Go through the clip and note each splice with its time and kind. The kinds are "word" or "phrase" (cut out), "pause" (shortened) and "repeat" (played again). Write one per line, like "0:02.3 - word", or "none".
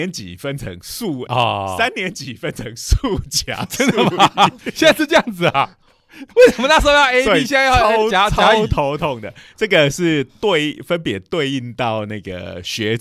0:01.3 - phrase
0:06.3 - pause